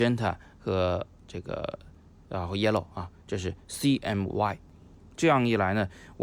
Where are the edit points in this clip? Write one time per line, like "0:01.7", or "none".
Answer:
none

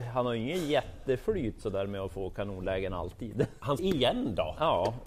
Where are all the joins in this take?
0:03.8

